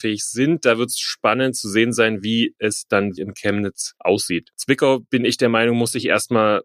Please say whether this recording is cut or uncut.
cut